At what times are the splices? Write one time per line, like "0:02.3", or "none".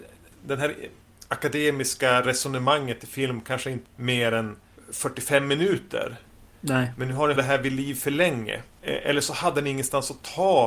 0:03.9
0:07.4